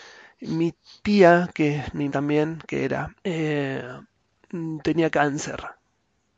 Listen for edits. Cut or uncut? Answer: cut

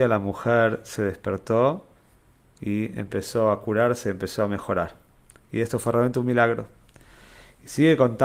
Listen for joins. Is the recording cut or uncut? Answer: uncut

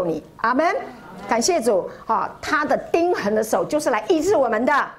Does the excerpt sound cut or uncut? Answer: uncut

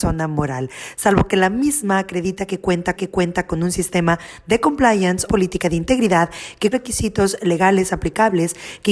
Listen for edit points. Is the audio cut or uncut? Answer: cut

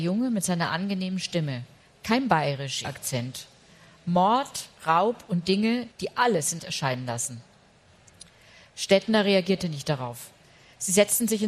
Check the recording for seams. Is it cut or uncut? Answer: cut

